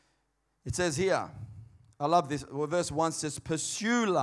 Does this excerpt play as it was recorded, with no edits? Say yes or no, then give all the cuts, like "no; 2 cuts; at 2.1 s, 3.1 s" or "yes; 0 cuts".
yes; 0 cuts